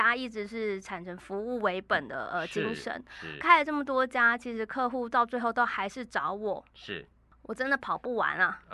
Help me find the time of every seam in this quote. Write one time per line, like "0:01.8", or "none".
none